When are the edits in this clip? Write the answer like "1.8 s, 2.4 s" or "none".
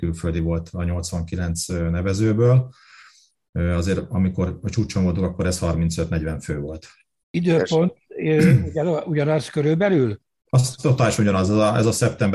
none